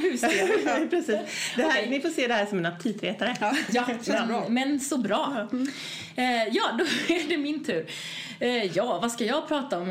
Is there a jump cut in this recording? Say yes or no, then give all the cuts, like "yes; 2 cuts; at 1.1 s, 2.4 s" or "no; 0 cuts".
no; 0 cuts